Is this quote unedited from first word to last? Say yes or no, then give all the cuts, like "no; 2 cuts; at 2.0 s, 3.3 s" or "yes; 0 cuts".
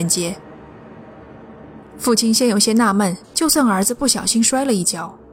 no; 1 cut; at 3.2 s